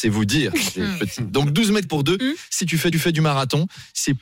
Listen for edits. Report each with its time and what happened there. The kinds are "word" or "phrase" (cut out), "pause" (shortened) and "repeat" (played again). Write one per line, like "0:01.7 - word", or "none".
0:01.9 - word
0:02.6 - phrase
0:02.9 - repeat